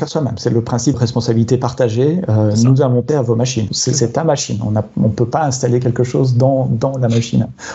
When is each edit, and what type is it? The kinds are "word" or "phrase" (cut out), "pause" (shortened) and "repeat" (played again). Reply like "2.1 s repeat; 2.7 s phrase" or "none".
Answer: 0.9 s word; 3.1 s word; 3.7 s word